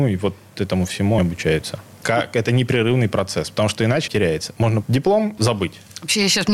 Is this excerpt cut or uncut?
cut